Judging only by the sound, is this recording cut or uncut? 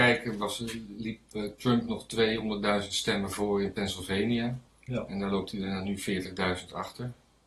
cut